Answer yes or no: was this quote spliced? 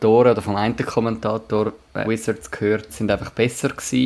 yes